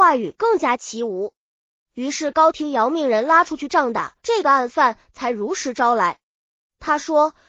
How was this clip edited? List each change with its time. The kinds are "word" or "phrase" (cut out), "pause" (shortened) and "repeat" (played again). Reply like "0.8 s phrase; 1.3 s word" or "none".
4.2 s pause